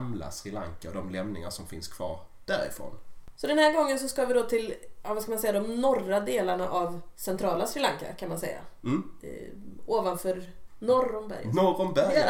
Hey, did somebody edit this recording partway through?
no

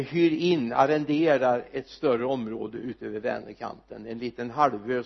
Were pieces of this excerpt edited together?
no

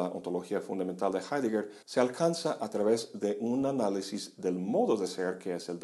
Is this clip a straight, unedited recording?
no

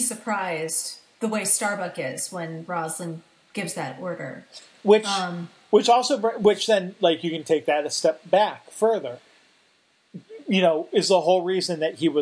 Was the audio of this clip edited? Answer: no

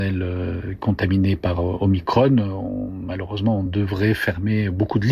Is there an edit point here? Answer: no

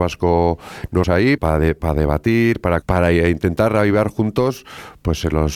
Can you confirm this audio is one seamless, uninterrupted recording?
no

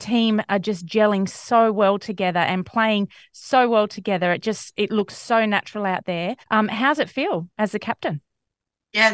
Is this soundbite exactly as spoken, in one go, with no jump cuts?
no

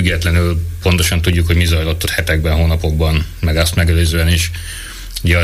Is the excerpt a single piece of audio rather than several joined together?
no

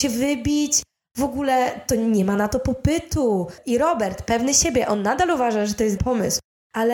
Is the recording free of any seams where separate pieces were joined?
no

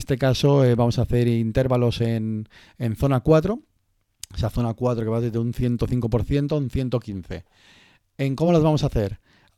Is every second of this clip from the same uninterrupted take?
yes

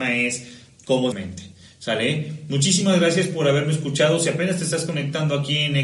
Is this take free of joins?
no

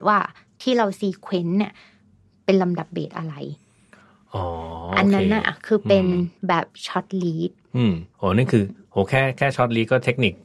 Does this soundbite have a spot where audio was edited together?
yes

